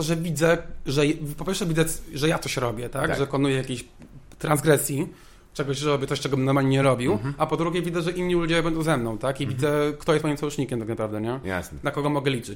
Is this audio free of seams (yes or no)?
yes